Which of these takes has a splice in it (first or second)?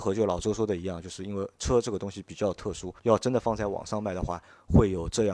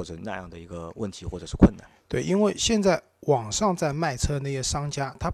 first